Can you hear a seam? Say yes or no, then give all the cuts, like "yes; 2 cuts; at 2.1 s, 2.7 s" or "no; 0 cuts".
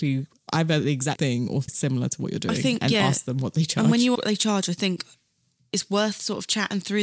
yes; 3 cuts; at 1.1 s, 1.7 s, 4.1 s